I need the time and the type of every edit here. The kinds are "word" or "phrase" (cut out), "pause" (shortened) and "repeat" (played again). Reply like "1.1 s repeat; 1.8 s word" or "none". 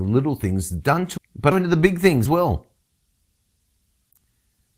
1.2 s word; 1.5 s word; 2.3 s word